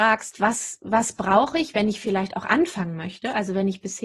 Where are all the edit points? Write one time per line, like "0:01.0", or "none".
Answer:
none